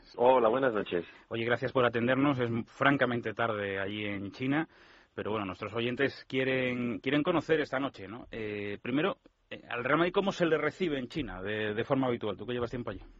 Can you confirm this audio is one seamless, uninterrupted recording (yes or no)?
yes